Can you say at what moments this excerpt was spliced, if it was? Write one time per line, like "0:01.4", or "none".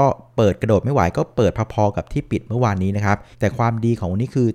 0:03.3